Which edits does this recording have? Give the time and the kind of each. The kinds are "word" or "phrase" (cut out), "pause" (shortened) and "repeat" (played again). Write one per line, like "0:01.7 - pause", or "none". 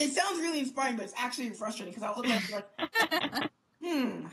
0:01.5 - word
0:02.2 - word